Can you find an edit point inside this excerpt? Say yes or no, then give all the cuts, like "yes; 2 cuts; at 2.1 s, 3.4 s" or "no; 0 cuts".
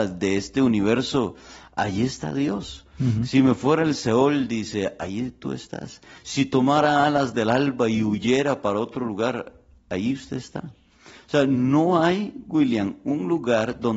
no; 0 cuts